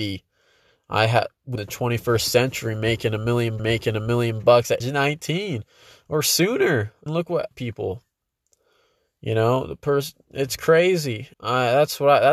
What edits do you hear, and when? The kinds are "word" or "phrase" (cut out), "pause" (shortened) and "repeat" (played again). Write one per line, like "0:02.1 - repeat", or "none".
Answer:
0:01.6 - phrase
0:03.6 - repeat
0:04.8 - word
0:07.1 - word
0:07.5 - phrase
0:11.3 - pause

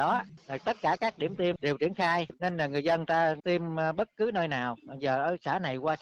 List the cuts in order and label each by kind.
0:02.3 - word

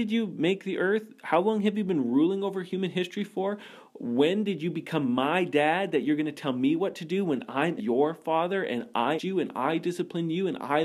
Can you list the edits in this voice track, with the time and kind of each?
0:07.8 - word
0:09.2 - word

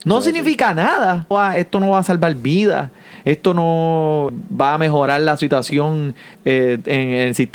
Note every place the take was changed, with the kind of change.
0:01.3 - phrase
0:04.3 - word
0:06.3 - word

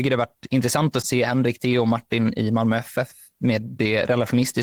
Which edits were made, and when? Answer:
0:01.0 - word

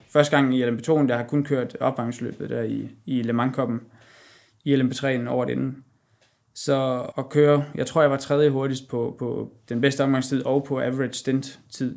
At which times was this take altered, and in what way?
0:07.1 - word

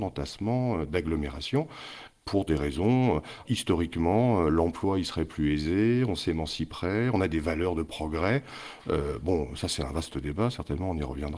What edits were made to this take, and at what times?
0:03.4 - word

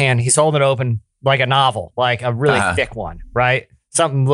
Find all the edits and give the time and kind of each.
none

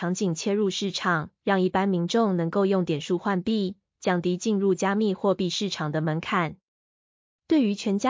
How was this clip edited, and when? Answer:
0:01.4 - pause

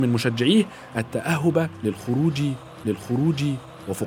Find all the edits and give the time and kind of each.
0:02.8 - repeat

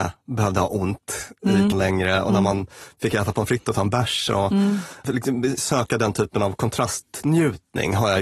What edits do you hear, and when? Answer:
0:01.7 - word

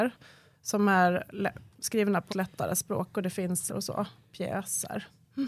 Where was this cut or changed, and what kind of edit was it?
0:02.3 - word
0:03.7 - phrase

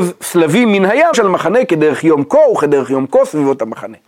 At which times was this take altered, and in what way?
0:01.1 - word

